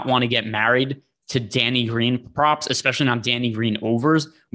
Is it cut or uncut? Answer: uncut